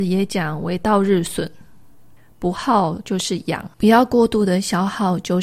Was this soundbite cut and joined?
yes; 1 cut; at 3.7 s

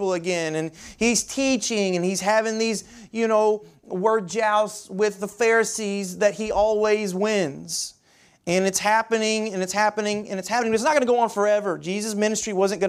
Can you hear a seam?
no; 0 cuts

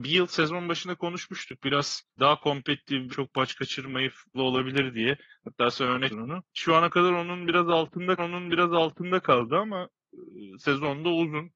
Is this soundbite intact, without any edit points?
no; 6 cuts; at 2.1 s, 3.1 s, 4.3 s, 6.1 s, 6.5 s, 8.2 s

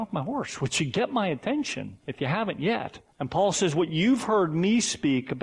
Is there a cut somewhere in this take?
yes; 1 cut; at 3.1 s

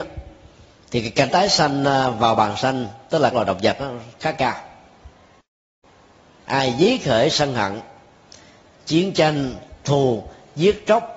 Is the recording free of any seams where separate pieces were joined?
no; 4 cuts; at 1.3 s, 3.3 s, 7.3 s, 9.8 s

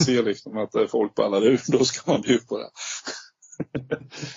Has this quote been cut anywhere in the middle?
no; 0 cuts

